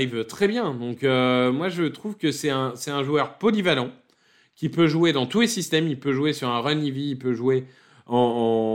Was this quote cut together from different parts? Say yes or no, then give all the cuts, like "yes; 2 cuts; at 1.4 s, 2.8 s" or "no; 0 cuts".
no; 0 cuts